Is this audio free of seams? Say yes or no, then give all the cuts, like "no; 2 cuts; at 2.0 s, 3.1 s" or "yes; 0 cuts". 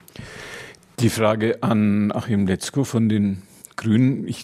yes; 0 cuts